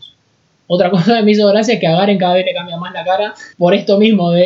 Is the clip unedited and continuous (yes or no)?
no